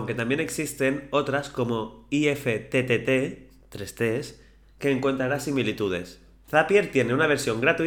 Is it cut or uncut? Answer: uncut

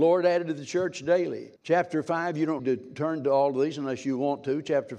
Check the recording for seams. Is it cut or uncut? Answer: cut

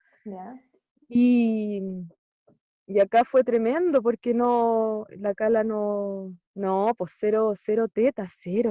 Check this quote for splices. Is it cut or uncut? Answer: cut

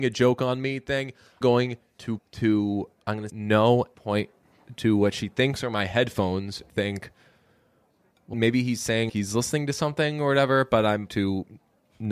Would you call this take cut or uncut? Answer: cut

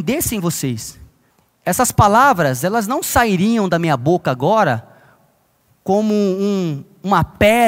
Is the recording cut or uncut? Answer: cut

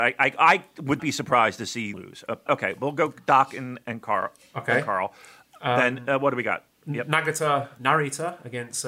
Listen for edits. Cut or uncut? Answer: cut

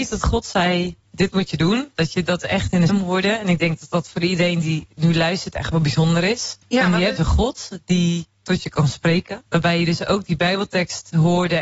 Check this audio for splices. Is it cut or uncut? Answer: cut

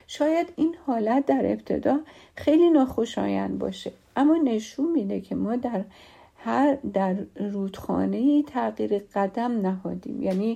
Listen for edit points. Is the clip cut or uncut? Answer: uncut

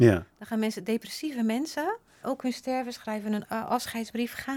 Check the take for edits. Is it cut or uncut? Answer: cut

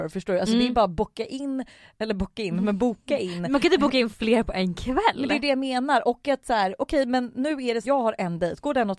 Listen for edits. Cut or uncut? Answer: cut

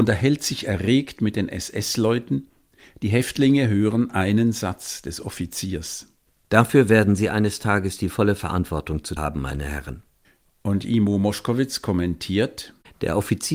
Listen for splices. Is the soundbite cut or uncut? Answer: cut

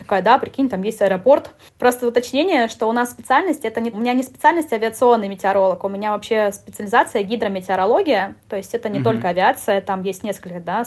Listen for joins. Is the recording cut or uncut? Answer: cut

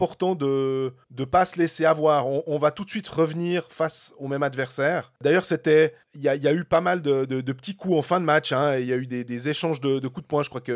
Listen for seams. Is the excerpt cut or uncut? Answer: cut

